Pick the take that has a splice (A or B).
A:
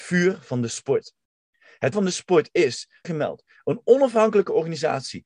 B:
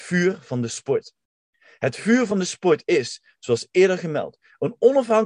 A